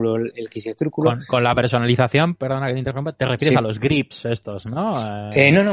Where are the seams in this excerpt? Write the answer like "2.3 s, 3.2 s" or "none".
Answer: none